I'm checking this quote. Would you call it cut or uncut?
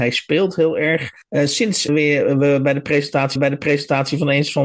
cut